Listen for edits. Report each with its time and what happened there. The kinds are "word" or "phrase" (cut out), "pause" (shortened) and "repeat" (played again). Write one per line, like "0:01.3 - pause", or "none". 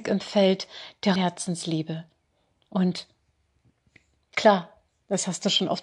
0:01.2 - word